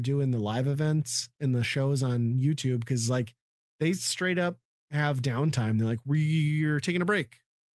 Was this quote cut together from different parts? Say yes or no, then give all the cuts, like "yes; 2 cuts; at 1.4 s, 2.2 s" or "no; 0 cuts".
no; 0 cuts